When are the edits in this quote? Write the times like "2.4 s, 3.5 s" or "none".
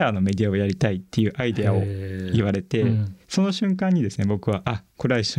3.2 s